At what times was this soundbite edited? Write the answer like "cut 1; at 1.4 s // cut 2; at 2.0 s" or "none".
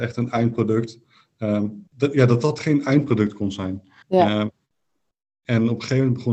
cut 1; at 1.9 s // cut 2; at 4.0 s